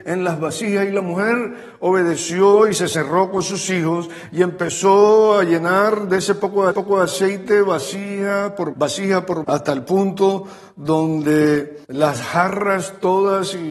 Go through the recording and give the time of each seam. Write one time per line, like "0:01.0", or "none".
0:06.7
0:08.7
0:09.4
0:11.8